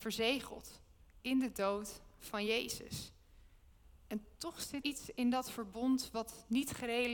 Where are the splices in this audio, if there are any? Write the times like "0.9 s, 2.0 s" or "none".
4.8 s